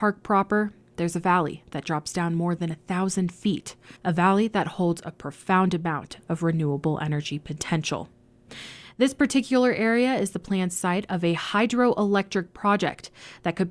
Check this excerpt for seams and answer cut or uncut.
cut